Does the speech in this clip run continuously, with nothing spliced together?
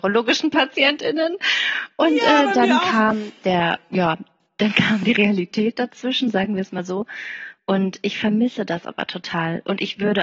yes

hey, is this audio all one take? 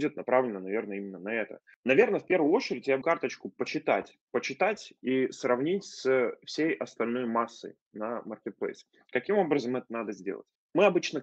no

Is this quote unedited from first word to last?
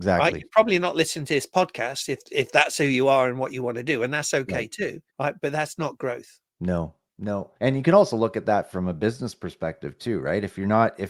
no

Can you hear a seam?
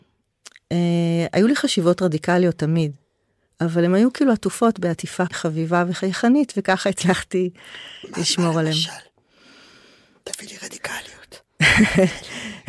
yes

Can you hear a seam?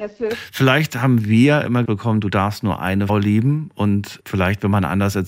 yes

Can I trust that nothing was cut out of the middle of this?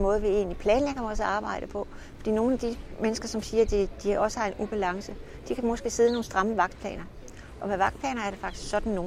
yes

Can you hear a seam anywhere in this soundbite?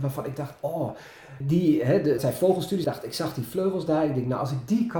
yes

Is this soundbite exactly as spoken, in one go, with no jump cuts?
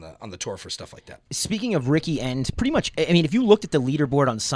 yes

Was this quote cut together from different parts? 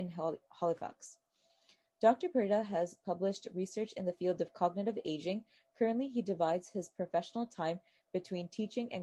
no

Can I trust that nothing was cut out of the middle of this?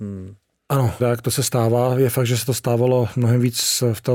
no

